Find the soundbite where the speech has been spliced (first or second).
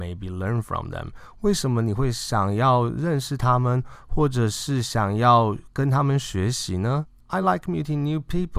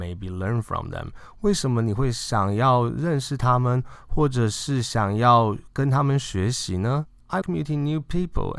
second